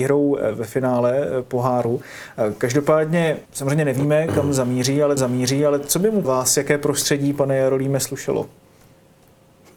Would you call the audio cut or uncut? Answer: cut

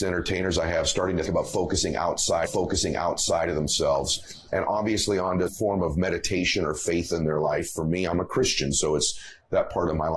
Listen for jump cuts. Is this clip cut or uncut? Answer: cut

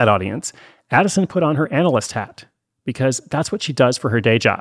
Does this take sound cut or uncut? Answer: uncut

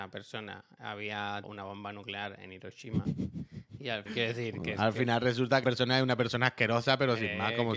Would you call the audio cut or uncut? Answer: cut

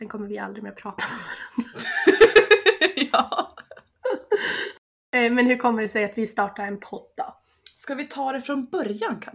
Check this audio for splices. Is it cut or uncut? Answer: uncut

